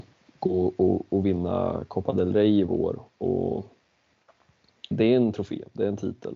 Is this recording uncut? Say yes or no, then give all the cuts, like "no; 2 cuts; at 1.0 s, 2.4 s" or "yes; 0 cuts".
no; 1 cut; at 4.9 s